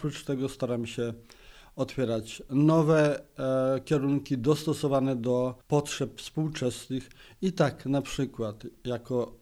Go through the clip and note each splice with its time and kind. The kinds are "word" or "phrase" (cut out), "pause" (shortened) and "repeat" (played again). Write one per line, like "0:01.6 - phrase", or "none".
0:05.6 - pause